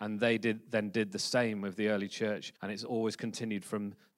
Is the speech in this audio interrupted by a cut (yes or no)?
yes